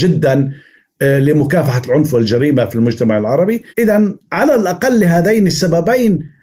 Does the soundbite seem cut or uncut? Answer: cut